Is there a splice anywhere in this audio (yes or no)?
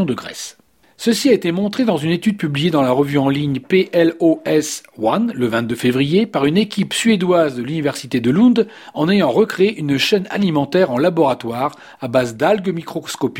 no